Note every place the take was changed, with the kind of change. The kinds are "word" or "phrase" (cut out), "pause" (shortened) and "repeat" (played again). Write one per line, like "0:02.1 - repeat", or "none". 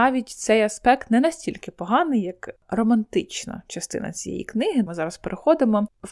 0:04.9 - word